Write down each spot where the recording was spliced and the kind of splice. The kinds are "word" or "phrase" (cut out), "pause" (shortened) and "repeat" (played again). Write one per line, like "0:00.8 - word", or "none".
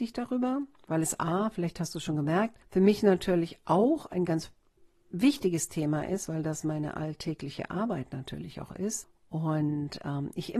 none